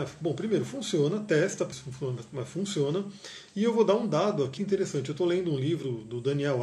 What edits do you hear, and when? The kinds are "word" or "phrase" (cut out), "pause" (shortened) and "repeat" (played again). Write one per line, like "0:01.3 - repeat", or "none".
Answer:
0:01.7 - word
0:04.6 - word